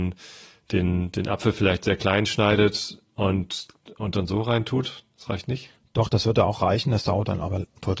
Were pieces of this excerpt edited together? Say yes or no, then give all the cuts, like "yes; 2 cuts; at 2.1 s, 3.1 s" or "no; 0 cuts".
no; 0 cuts